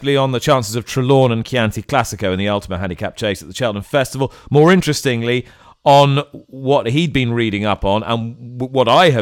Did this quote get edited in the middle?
no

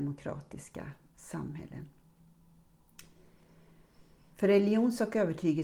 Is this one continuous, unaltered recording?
no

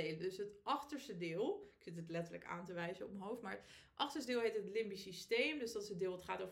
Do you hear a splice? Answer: no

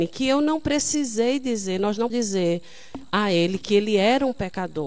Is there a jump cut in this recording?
yes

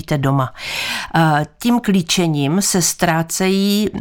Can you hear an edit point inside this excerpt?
no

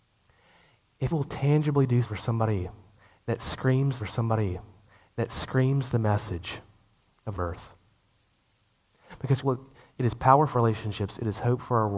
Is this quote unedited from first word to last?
no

